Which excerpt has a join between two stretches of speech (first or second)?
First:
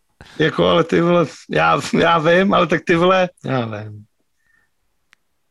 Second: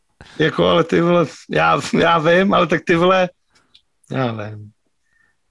first